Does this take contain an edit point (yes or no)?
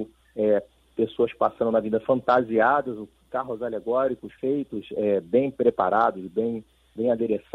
yes